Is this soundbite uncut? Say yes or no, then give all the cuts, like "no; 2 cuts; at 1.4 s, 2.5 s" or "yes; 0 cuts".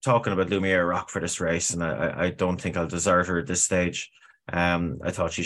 yes; 0 cuts